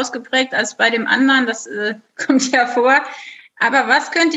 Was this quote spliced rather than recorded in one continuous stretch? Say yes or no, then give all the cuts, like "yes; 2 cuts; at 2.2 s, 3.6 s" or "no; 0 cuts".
no; 0 cuts